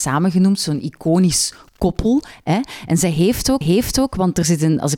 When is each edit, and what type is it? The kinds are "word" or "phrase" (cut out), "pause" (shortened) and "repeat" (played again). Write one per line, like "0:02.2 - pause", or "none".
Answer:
0:03.6 - repeat